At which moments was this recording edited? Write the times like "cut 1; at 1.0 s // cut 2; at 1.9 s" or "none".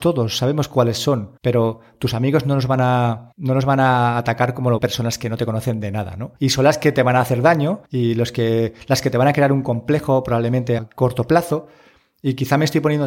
cut 1; at 1.4 s // cut 2; at 3.3 s // cut 3; at 4.8 s // cut 4; at 6.4 s // cut 5; at 7.9 s // cut 6; at 10.8 s